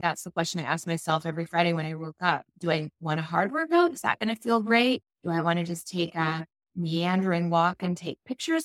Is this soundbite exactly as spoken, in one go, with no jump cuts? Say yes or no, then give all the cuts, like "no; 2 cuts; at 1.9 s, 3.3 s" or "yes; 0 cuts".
yes; 0 cuts